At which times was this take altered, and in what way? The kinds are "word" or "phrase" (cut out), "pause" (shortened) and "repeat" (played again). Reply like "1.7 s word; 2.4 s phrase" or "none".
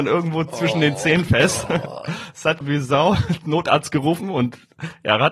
2.6 s word